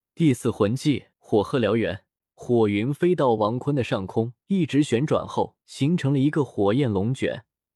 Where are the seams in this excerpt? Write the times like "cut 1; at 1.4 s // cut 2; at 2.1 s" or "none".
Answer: cut 1; at 1.1 s // cut 2; at 2.2 s // cut 3; at 4.4 s // cut 4; at 5.6 s